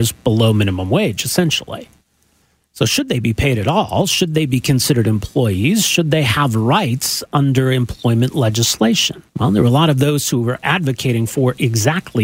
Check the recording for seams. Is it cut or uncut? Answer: cut